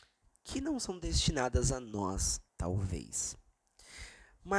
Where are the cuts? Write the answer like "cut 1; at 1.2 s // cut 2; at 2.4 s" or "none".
cut 1; at 2.5 s